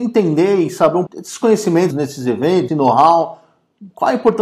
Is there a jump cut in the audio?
yes; 3 cuts; at 1.1 s, 1.9 s, 2.7 s

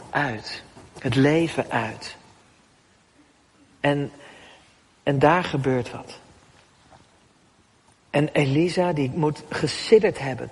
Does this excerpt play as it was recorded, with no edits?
yes; 0 cuts

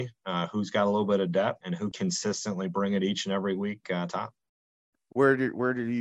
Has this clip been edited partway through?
yes; 3 cuts; at 1.6 s, 1.9 s, 4.1 s

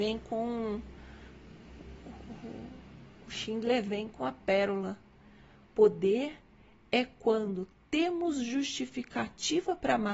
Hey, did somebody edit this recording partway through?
no; 0 cuts

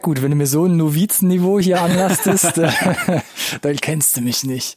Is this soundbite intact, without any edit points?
yes; 0 cuts

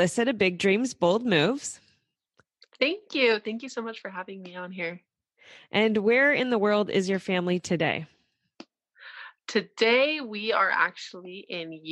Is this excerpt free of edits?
yes; 0 cuts

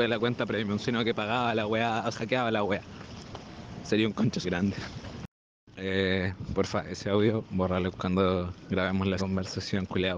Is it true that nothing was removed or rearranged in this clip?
no; 4 cuts; at 2.1 s, 4.4 s, 7.9 s, 9.2 s

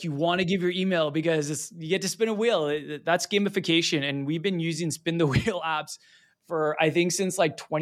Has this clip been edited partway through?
no; 0 cuts

